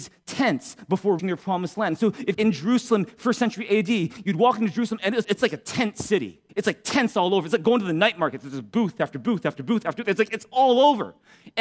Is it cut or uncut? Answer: cut